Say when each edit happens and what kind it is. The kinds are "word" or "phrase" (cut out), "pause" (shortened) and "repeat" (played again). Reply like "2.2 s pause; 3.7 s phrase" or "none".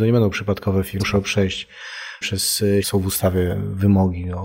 1.0 s phrase; 2.2 s word; 2.8 s word

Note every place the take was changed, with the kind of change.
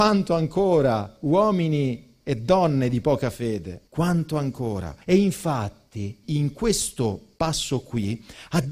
3.9 s pause; 5.0 s pause; 6.2 s word

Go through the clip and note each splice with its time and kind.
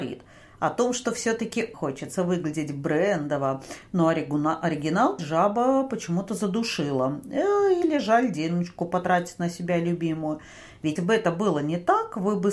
1.7 s word; 5.2 s word; 11.0 s word

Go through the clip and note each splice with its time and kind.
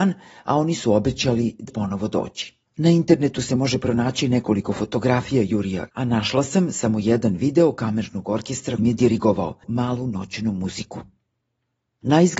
1.7 s word; 2.7 s pause; 5.9 s word; 8.8 s word

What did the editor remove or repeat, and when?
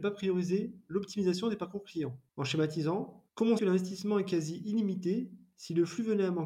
2.3 s pause; 3.3 s pause; 3.6 s word

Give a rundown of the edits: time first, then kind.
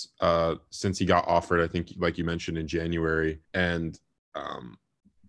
3.4 s pause

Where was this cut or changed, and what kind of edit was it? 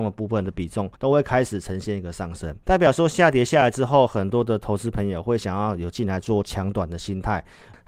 0.9 s pause; 2.6 s pause

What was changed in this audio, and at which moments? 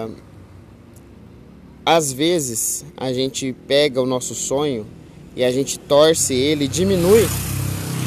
none

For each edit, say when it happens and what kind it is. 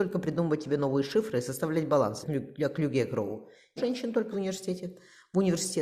2.2 s word; 3.8 s word; 4.3 s word

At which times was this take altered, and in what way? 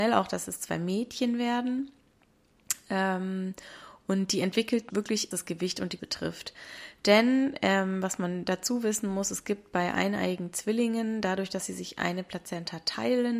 4.9 s word; 5.3 s phrase; 6.0 s word

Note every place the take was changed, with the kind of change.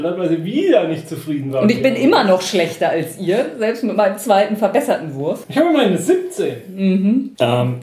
none

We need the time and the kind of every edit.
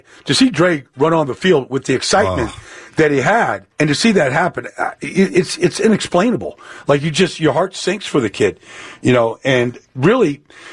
3.7 s pause

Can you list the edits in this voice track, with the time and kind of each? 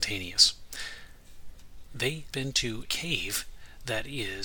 2.3 s word; 2.8 s word

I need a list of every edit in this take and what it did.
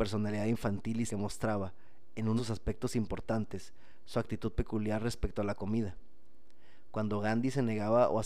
1.1 s word; 2.4 s word

